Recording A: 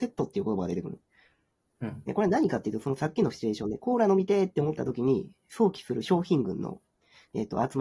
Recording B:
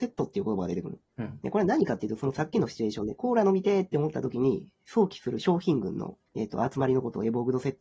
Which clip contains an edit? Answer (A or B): B